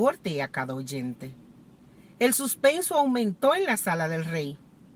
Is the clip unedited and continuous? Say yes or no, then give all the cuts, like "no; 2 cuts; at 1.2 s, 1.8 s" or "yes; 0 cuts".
yes; 0 cuts